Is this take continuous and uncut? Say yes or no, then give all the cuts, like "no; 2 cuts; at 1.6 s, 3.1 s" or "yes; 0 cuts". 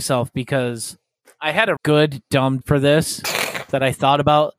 no; 2 cuts; at 1.8 s, 2.6 s